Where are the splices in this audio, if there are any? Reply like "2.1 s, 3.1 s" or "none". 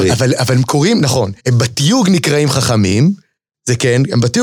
1.4 s